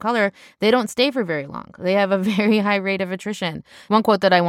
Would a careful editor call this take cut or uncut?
uncut